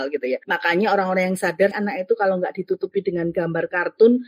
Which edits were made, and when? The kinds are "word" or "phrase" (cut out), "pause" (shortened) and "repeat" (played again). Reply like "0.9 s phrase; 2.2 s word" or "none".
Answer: 1.7 s word